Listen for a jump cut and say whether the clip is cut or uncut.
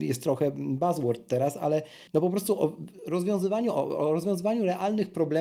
cut